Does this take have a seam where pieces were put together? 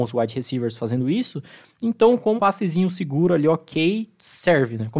yes; 1 cut; at 2.4 s

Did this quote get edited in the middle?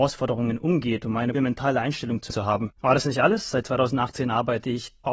yes; 3 cuts; at 1.3 s, 2.3 s, 2.8 s

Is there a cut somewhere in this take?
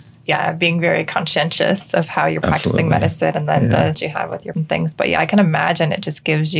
yes; 2 cuts; at 3.9 s, 4.5 s

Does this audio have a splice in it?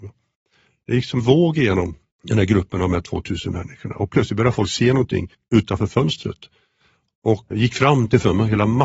yes; 4 cuts; at 1.2 s, 2.1 s, 5.3 s, 7.5 s

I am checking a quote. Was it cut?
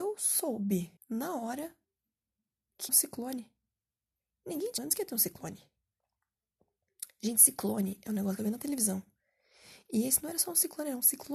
yes; 4 cuts; at 1.0 s, 2.9 s, 4.8 s, 8.4 s

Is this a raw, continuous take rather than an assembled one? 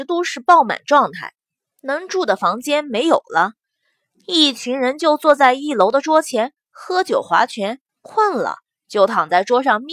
no; 1 cut; at 7.9 s

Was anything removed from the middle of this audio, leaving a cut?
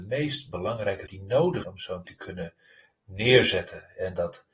yes; 3 cuts; at 1.1 s, 1.6 s, 2.1 s

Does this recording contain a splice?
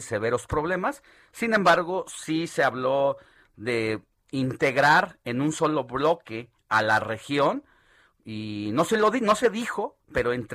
no; 0 cuts

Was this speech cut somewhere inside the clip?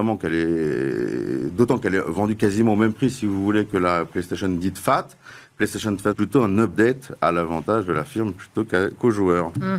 yes; 1 cut; at 6.1 s

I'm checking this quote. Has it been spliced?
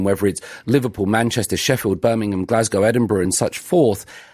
no; 0 cuts

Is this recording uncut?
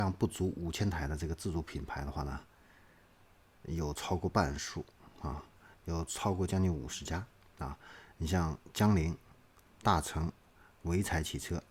yes; 0 cuts

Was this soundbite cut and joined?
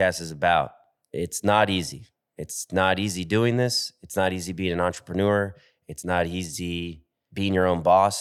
no; 0 cuts

